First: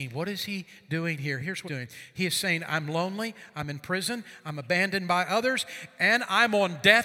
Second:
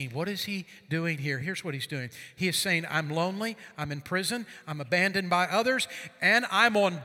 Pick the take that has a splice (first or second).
first